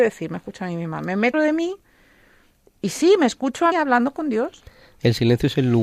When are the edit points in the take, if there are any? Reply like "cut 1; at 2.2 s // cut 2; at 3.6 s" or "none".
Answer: cut 1; at 1.3 s // cut 2; at 3.7 s